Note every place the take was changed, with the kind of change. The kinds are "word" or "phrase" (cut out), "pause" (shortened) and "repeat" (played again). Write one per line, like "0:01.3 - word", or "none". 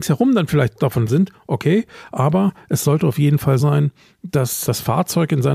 0:01.1 - word
0:03.6 - word
0:04.6 - word